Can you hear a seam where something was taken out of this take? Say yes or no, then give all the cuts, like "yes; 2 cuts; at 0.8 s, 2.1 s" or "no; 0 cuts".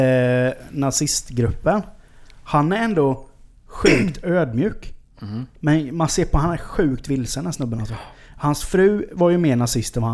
no; 0 cuts